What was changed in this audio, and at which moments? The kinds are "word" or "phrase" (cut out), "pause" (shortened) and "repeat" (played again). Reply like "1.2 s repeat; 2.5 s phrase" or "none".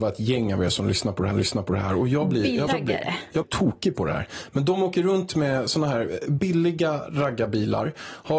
1.3 s repeat; 2.7 s word; 3.4 s word